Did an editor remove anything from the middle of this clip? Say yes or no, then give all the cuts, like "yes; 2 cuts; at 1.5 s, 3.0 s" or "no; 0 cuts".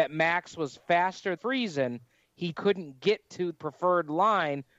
yes; 3 cuts; at 1.4 s, 2.5 s, 3.5 s